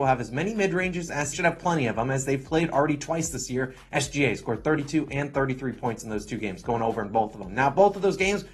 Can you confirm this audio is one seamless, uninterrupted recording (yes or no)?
no